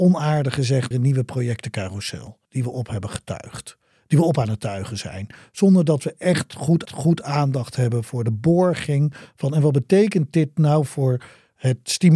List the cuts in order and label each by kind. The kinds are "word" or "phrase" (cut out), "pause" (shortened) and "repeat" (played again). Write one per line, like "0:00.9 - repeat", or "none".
0:00.9 - word
0:02.4 - pause
0:06.9 - repeat